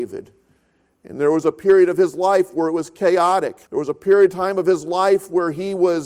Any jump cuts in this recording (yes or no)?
yes